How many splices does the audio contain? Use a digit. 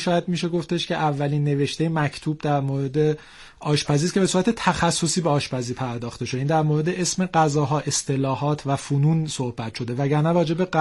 0